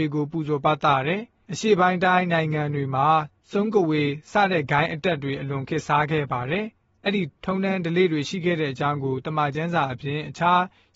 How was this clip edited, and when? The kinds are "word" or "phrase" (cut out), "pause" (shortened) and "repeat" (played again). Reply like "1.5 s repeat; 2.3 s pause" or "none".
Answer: 6.8 s pause